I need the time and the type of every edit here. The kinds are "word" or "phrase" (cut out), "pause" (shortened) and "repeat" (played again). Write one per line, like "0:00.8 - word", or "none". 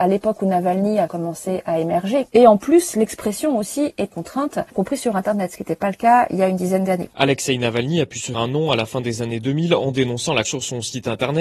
0:01.1 - word
0:04.1 - word
0:04.7 - pause
0:08.3 - word
0:10.4 - word